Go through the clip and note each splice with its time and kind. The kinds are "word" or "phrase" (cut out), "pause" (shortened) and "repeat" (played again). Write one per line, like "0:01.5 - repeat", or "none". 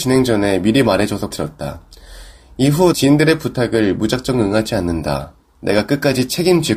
0:01.3 - phrase
0:02.9 - word